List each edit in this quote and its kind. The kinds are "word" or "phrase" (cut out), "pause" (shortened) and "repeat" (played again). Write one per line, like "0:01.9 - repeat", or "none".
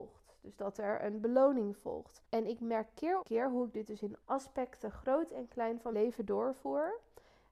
0:02.2 - pause
0:03.2 - word
0:04.2 - word
0:05.9 - word